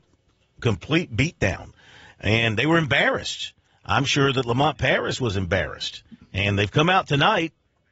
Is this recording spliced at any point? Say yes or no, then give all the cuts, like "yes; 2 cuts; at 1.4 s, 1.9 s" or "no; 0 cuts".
no; 0 cuts